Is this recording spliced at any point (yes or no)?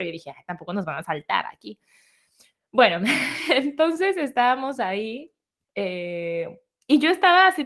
no